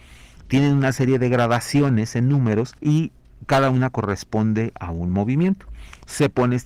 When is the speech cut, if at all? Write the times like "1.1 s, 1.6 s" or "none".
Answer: 2.8 s

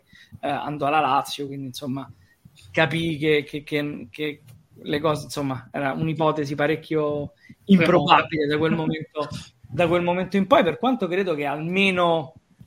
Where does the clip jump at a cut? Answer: none

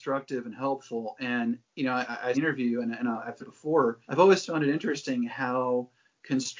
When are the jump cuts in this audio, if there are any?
2.3 s, 3.4 s, 4.0 s

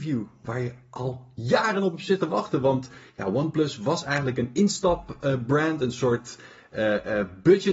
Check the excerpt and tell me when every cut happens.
none

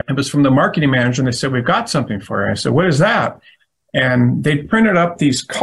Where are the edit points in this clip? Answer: none

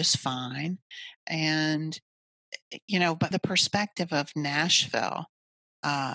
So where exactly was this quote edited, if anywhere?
3.3 s

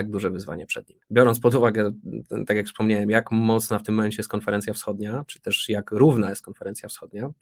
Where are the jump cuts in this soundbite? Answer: none

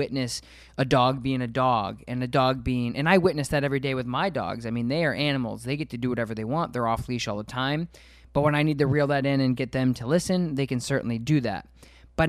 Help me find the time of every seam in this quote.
none

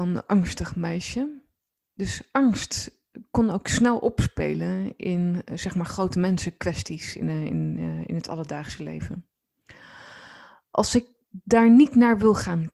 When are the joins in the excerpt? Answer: none

